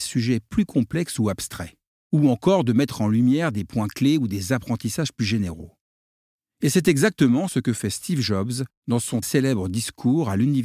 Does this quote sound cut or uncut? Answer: cut